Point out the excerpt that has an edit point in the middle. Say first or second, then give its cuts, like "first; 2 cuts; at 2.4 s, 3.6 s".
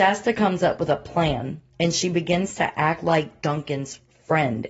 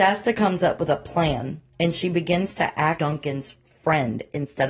second; 1 cut; at 3.0 s